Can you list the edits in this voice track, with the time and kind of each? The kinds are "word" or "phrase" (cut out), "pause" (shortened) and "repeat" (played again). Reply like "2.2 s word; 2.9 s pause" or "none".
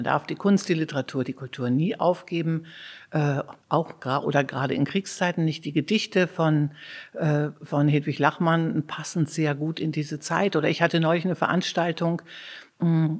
3.6 s pause